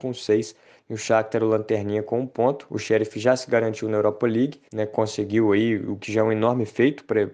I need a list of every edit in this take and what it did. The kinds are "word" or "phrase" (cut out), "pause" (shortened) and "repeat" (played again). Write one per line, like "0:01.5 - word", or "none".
0:04.7 - pause